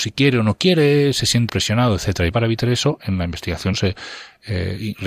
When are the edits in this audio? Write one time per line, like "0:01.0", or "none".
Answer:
0:01.5
0:02.3
0:03.7